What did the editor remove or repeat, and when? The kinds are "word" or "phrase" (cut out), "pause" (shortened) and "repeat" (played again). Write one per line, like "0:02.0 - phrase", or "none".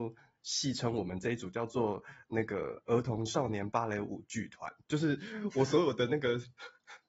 0:04.8 - pause